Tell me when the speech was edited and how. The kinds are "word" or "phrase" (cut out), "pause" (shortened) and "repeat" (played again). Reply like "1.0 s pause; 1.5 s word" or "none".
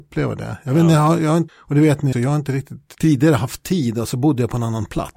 1.5 s word; 2.1 s word; 2.9 s word